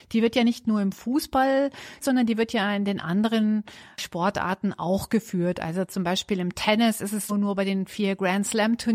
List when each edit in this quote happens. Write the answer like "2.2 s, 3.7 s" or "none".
2.0 s, 7.3 s

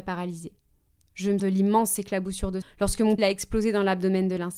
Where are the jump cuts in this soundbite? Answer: 1.4 s, 2.6 s, 3.2 s

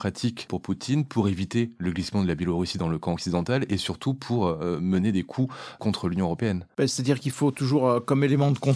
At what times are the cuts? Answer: none

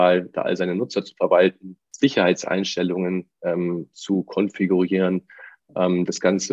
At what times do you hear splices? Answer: none

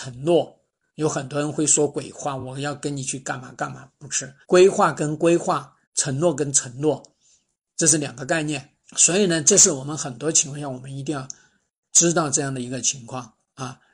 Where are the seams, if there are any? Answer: 4.4 s, 5.8 s, 8.8 s

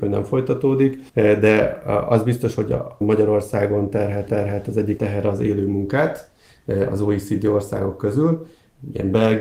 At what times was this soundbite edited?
1.1 s, 3.0 s, 4.3 s, 5.0 s

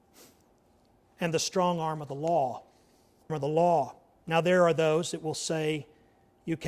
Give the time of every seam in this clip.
3.3 s

